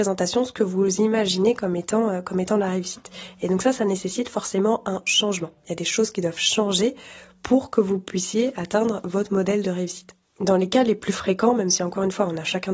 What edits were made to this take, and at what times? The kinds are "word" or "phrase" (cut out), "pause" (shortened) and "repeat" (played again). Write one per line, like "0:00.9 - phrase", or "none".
none